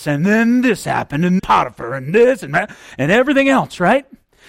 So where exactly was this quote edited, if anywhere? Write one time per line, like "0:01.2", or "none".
0:01.4